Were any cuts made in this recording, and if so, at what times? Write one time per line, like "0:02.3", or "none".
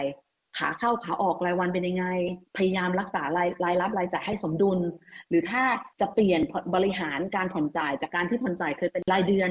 0:02.5
0:05.9